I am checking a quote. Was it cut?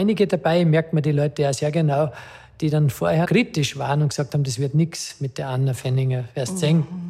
yes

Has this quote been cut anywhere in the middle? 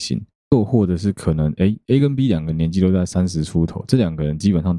no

